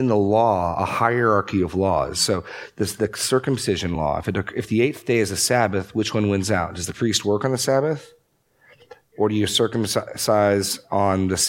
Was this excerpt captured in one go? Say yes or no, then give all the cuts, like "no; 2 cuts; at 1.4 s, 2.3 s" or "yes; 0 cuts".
yes; 0 cuts